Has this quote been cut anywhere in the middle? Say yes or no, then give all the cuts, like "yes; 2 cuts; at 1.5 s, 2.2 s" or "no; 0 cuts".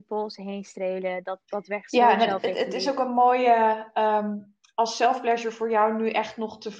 no; 0 cuts